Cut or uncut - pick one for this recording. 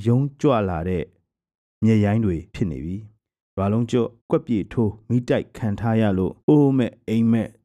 cut